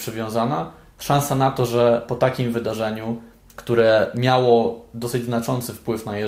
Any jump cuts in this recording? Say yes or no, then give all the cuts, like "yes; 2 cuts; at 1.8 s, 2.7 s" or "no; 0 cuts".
no; 0 cuts